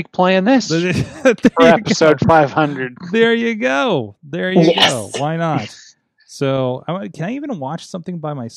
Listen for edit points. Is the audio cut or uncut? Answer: uncut